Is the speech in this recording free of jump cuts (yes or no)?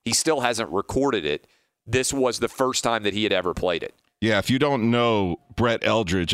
yes